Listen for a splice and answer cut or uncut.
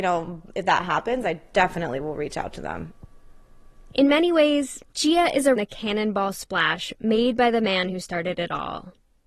cut